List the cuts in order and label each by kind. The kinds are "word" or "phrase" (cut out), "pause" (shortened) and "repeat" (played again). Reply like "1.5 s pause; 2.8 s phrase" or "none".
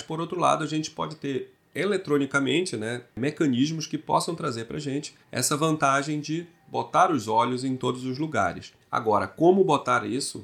1.6 s pause; 5.2 s pause; 8.8 s pause